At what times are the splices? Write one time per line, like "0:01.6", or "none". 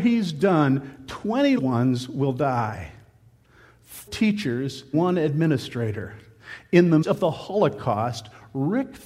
0:01.6
0:04.1
0:04.9
0:07.0